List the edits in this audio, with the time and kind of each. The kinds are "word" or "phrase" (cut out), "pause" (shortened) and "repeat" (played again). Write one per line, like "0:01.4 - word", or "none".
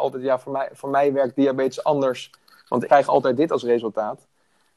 0:02.9 - word